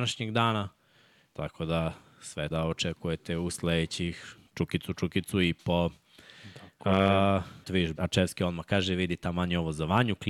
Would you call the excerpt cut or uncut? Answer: cut